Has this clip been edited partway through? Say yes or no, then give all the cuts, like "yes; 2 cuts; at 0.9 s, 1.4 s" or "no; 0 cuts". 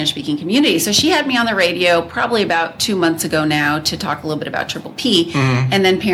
no; 0 cuts